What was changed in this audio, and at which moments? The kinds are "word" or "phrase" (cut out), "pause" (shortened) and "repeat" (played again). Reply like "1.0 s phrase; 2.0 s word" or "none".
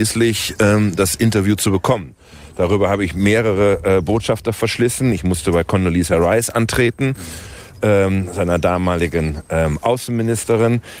none